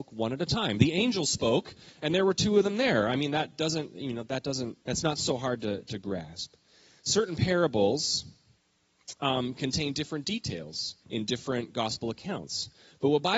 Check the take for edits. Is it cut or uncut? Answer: cut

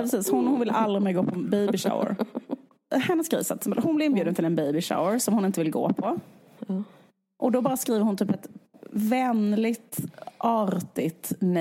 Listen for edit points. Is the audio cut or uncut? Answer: uncut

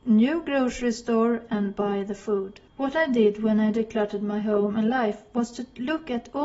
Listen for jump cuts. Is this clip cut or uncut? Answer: cut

